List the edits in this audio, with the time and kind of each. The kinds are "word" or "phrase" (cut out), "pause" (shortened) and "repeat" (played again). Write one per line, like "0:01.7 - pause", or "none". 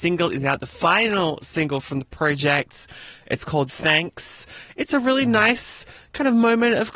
none